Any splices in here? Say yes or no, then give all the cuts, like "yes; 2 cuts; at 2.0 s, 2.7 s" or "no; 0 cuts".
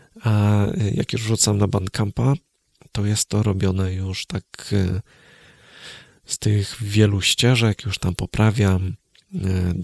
no; 0 cuts